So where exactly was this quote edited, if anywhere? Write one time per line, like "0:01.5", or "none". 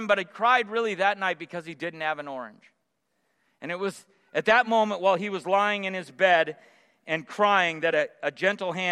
none